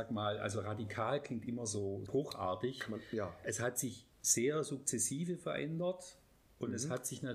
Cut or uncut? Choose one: cut